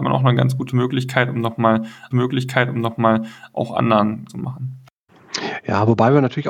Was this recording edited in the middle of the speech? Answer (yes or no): yes